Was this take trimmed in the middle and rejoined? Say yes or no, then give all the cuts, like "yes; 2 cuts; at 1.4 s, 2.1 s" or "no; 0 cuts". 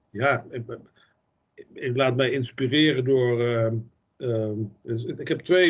no; 0 cuts